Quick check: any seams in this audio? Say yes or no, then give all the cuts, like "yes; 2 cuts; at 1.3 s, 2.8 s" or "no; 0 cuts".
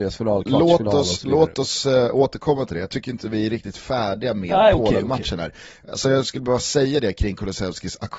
no; 0 cuts